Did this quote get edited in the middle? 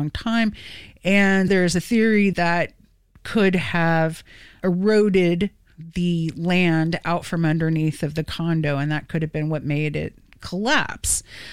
yes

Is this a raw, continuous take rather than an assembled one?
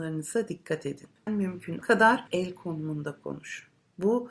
no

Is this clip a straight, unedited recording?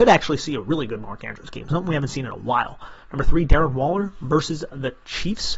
yes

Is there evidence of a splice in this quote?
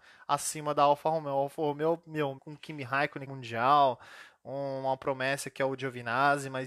yes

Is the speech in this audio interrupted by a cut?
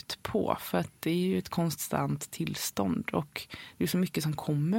no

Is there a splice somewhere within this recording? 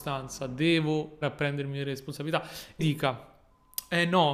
yes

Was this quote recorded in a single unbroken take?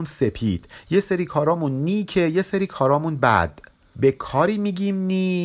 yes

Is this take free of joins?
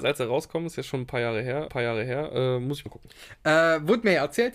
no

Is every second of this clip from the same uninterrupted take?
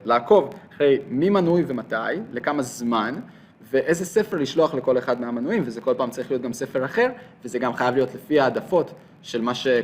yes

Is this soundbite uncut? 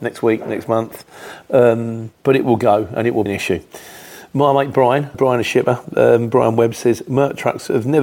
no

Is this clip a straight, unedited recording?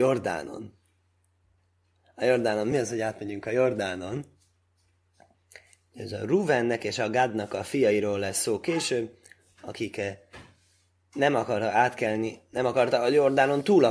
yes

